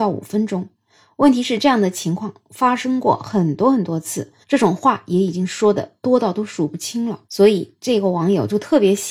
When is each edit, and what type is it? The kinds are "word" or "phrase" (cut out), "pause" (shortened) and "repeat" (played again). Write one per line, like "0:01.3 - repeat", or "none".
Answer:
0:04.4 - pause
0:07.2 - pause